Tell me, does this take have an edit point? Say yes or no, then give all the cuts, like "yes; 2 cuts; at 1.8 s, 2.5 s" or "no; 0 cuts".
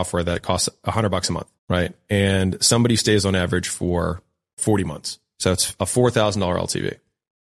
yes; 1 cut; at 1.6 s